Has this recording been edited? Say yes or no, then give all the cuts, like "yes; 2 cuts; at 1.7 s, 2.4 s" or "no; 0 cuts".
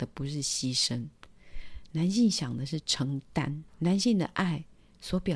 yes; 1 cut; at 3.7 s